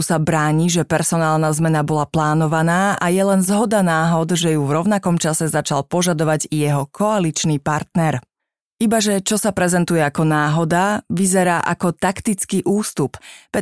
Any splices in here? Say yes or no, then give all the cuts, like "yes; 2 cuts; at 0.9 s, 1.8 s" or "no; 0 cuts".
no; 0 cuts